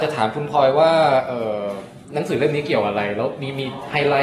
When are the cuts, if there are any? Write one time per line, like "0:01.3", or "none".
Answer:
0:02.0